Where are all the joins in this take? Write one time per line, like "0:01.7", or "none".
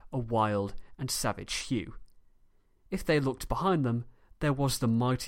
none